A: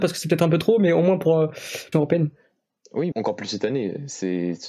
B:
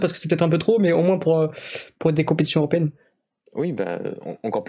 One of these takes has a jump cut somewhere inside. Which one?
A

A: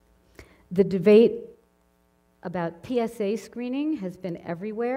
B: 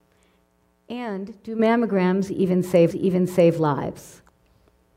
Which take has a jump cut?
B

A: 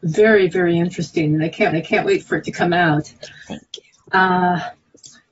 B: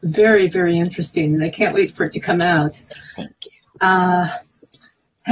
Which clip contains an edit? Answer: A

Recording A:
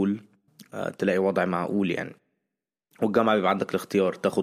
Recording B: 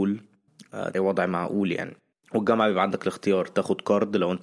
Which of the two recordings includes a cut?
B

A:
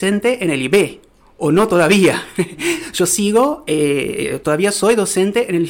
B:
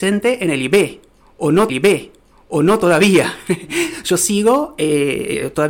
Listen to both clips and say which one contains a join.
B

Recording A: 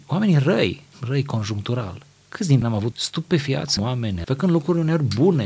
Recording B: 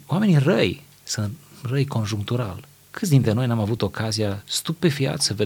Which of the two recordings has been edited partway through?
A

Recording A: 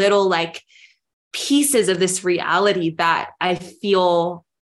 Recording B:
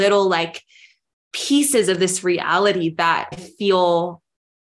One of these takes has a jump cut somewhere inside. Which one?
B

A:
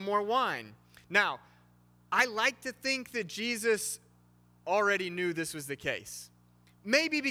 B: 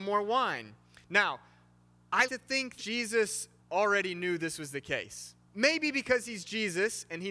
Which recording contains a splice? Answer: B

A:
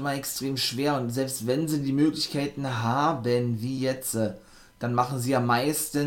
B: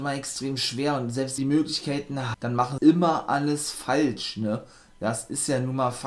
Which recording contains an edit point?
B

